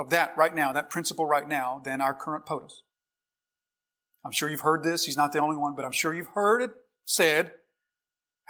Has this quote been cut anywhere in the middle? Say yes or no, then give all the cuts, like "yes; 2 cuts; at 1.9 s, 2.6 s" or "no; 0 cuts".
no; 0 cuts